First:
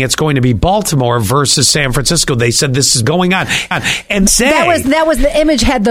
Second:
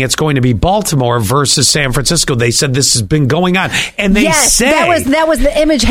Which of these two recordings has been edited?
first; 3 cuts; at 3.0 s, 3.7 s, 4.3 s

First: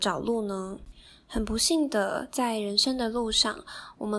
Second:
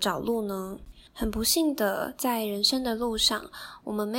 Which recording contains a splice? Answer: second; 1 cut; at 1.1 s

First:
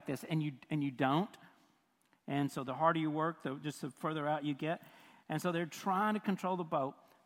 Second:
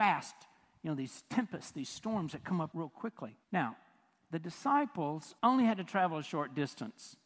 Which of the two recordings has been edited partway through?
second; 3 cuts; at 2.7 s, 3.4 s, 5.4 s

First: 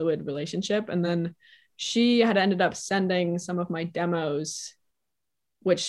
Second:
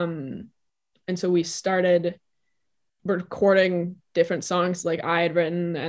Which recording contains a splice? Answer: second; 1 cut; at 3.0 s

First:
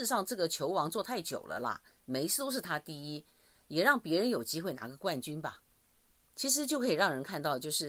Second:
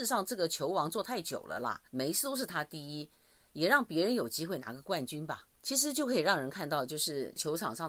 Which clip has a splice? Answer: second; 2 cuts; at 1.9 s, 5.5 s

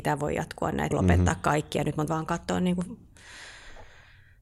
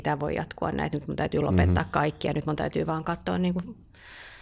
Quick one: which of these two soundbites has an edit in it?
first; 2 cuts; at 0.9 s, 2.1 s

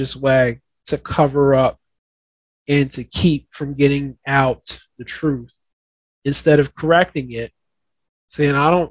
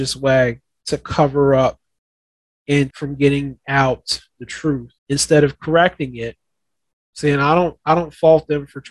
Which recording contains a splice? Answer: second; 2 cuts; at 2.9 s, 5.0 s

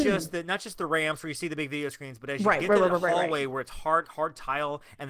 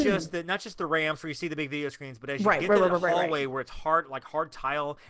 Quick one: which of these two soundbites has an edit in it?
first; 1 cut; at 4.0 s

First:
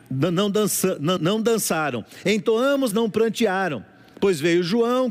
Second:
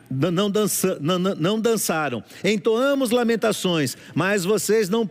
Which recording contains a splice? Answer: first; 2 cuts; at 1.2 s, 2.9 s

